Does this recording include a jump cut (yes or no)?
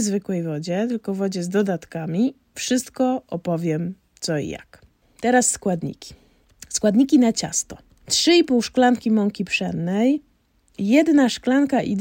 no